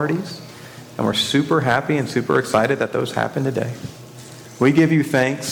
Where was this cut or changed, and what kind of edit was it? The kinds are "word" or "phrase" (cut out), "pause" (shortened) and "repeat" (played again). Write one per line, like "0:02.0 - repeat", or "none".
none